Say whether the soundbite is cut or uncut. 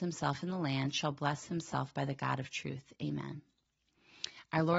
uncut